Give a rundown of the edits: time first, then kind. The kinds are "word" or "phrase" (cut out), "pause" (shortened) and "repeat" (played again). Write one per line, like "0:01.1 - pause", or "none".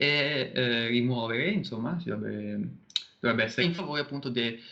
0:03.6 - word